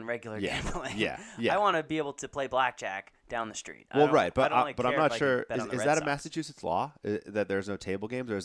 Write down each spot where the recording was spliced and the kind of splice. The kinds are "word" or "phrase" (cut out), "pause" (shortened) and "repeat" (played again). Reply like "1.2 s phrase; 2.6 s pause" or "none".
none